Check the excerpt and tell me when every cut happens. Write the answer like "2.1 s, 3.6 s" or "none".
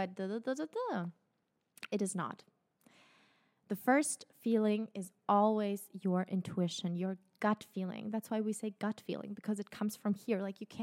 none